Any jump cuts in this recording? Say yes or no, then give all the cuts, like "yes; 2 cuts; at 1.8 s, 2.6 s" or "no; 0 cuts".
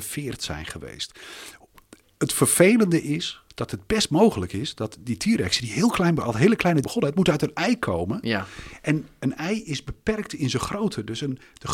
yes; 2 cuts; at 3.5 s, 6.8 s